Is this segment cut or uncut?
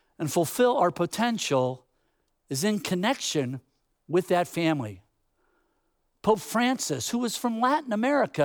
uncut